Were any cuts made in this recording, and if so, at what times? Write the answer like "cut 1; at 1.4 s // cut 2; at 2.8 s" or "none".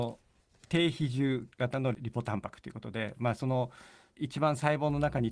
none